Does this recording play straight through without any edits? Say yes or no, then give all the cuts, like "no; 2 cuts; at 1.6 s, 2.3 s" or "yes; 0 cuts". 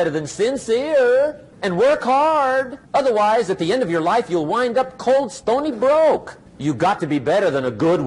no; 3 cuts; at 1.5 s, 2.9 s, 6.5 s